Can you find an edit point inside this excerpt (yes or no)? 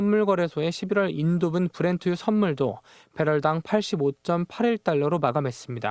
no